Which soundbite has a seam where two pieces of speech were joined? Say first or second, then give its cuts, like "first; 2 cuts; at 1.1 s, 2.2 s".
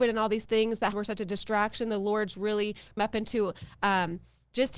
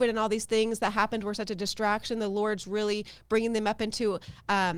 first; 2 cuts; at 0.9 s, 3.0 s